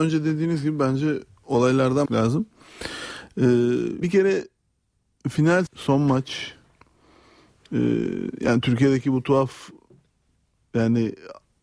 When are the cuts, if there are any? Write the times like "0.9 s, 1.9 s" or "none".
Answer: 2.1 s, 4.0 s, 5.7 s